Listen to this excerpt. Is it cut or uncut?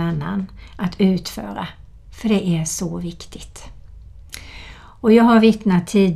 uncut